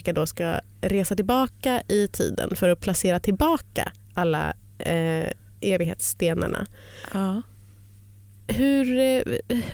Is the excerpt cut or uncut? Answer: uncut